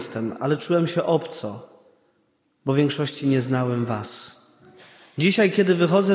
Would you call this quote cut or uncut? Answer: uncut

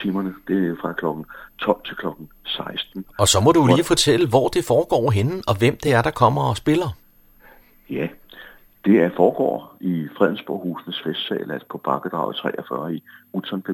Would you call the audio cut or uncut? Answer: uncut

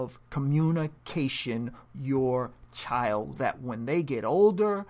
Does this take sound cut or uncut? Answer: cut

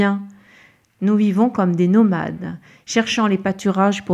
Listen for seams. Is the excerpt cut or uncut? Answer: uncut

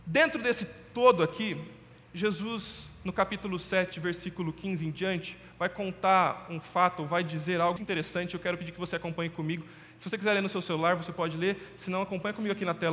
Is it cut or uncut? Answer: cut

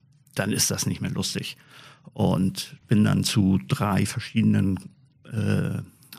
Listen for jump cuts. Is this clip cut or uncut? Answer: cut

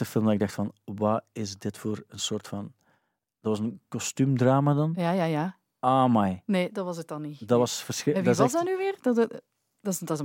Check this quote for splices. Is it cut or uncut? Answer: uncut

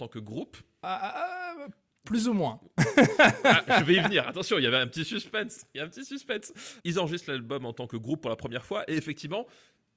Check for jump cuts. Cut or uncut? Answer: uncut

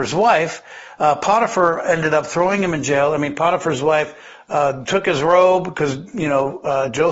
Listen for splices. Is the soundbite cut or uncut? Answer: uncut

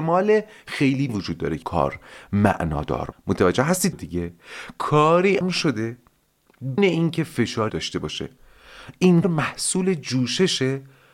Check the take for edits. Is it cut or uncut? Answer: cut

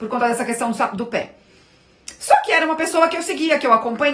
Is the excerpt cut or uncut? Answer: uncut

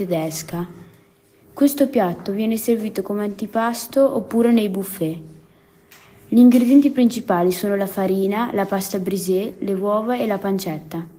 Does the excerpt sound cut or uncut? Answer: uncut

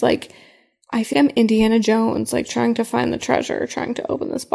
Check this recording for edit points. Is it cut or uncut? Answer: cut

